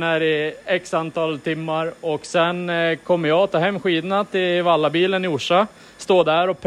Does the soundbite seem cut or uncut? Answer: uncut